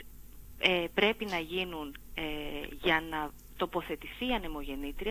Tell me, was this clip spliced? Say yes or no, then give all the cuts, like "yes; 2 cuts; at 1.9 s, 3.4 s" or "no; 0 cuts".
no; 0 cuts